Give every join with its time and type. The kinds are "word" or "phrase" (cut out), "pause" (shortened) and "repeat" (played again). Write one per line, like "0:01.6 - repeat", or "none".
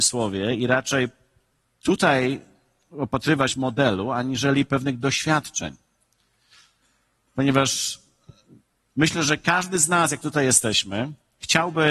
none